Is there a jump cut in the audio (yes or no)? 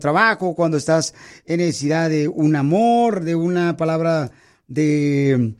no